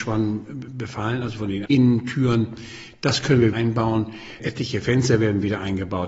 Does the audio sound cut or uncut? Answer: cut